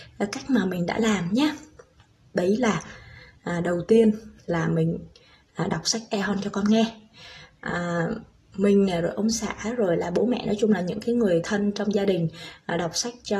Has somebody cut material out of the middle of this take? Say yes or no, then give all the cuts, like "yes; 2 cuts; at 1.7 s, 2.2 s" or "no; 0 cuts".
no; 0 cuts